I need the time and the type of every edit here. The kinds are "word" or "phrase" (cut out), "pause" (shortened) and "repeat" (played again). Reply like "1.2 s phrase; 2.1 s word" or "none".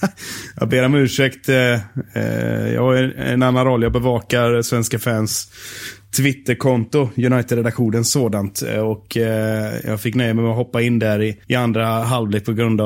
11.4 s pause